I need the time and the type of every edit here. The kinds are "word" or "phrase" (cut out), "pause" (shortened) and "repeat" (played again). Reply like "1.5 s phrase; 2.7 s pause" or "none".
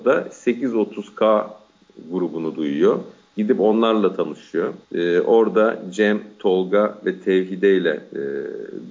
4.8 s pause